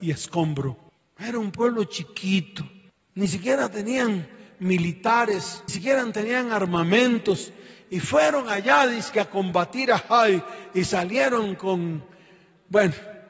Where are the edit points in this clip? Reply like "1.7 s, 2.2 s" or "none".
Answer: 5.7 s